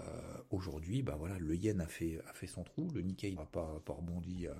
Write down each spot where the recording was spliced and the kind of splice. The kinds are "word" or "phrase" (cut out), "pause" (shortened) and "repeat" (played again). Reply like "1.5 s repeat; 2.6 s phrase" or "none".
3.4 s word